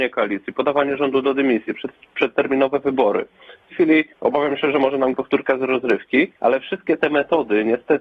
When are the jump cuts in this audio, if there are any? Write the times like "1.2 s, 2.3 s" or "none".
3.7 s, 4.1 s, 5.1 s, 6.4 s